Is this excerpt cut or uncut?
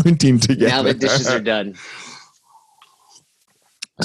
uncut